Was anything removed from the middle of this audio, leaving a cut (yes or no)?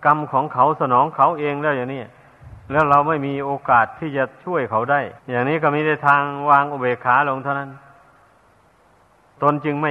yes